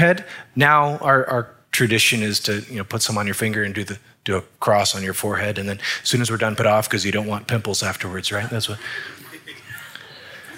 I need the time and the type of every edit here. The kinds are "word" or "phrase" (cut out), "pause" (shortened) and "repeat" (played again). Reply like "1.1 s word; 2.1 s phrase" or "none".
6.6 s phrase